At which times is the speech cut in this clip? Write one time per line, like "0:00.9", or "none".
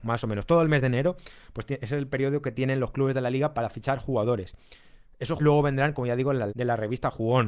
0:05.4
0:06.5

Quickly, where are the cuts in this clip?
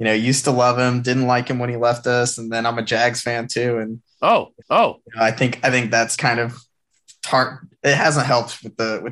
0:04.6
0:06.2

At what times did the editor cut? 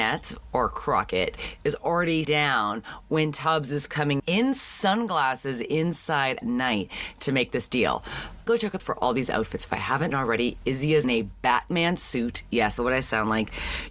0:02.2
0:04.2
0:06.4
0:08.5
0:08.8
0:10.1
0:11.0
0:12.8

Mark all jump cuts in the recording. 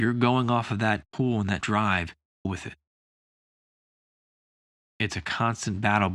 0:01.0
0:01.6
0:02.4

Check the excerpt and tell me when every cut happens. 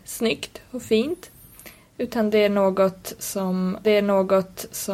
0:03.8

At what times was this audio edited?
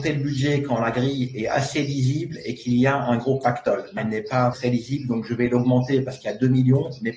0:04.0
0:04.5

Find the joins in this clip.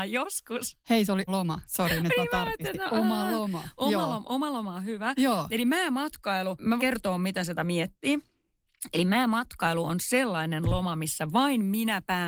0:01.3
0:06.8
0:07.6

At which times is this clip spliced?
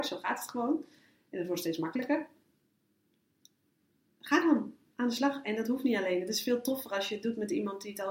none

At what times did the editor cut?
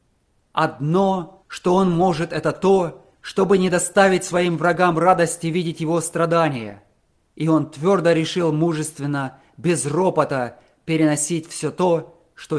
0:03.1
0:07.2

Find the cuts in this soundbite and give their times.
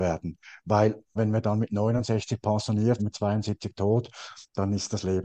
0:01.2
0:03.0

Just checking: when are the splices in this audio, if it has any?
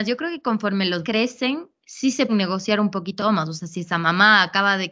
0:01.0
0:02.3
0:03.2

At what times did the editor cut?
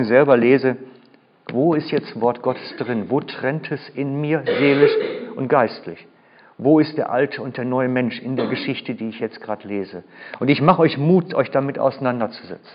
none

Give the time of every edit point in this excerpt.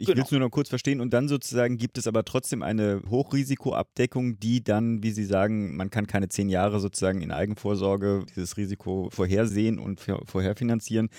none

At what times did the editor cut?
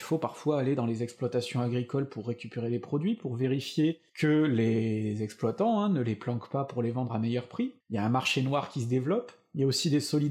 0:04.1
0:07.8

